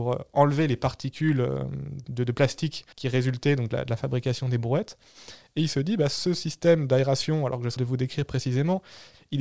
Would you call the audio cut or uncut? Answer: cut